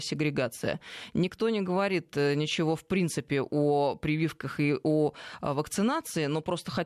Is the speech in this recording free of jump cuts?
yes; 0 cuts

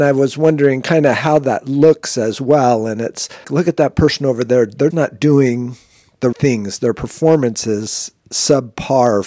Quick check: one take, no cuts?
no; 4 cuts; at 3.4 s, 4.9 s, 6.3 s, 8.2 s

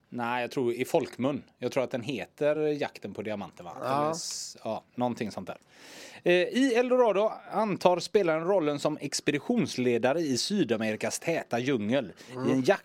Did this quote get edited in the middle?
no; 0 cuts

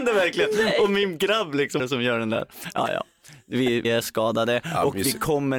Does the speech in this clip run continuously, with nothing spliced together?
no; 2 cuts; at 1.8 s, 3.8 s

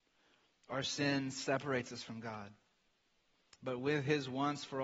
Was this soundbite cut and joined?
no; 0 cuts

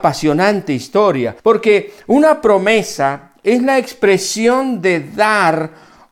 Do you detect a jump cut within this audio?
yes; 1 cut; at 1.4 s

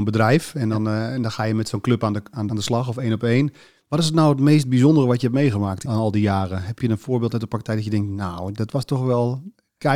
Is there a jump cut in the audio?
yes; 3 cuts; at 2.5 s, 5.9 s, 6.8 s

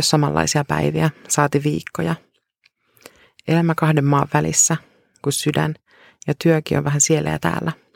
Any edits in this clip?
no; 0 cuts

